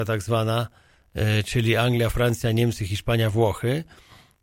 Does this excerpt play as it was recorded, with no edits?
yes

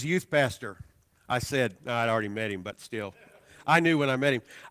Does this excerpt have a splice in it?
no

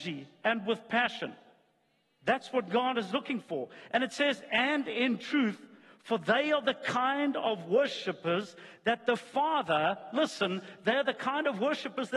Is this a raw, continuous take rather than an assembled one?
yes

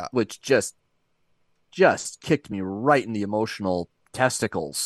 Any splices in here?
no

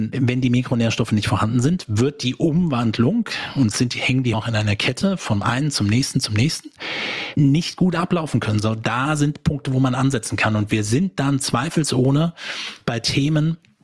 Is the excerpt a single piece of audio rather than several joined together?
no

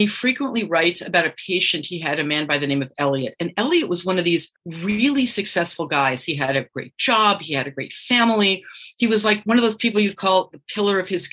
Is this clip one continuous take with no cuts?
no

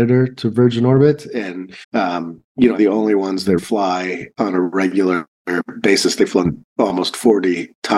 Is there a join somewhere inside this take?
yes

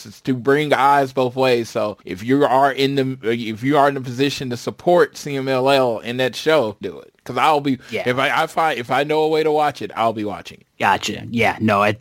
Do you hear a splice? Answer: yes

